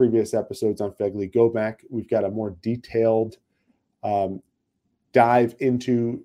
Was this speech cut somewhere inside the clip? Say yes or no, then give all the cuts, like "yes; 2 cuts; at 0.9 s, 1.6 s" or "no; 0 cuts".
no; 0 cuts